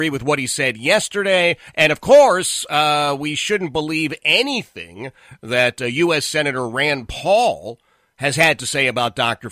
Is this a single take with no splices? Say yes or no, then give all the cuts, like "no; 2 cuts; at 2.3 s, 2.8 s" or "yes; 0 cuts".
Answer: yes; 0 cuts